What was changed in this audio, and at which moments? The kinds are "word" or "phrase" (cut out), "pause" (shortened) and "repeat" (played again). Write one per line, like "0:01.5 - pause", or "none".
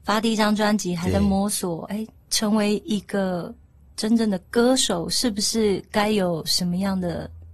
none